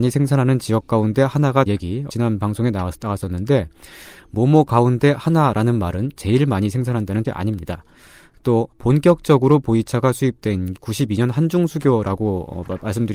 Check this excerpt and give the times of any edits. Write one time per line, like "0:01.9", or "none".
0:01.7
0:02.1
0:06.1
0:07.2
0:08.7
0:10.7